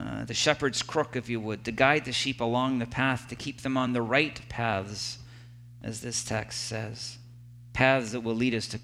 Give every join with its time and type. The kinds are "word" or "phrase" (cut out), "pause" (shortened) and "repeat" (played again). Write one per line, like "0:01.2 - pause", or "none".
none